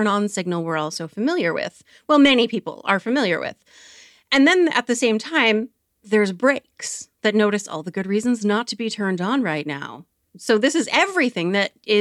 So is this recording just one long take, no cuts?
yes; 0 cuts

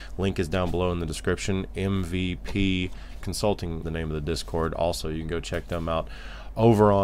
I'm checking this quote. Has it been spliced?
yes; 2 cuts; at 3.2 s, 3.8 s

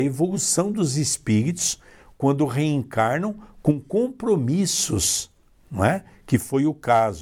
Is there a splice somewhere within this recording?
no; 0 cuts

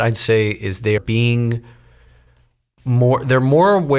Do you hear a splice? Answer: yes; 1 cut; at 1.0 s

